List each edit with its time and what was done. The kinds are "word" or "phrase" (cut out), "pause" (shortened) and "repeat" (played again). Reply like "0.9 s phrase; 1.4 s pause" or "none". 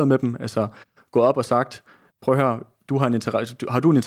none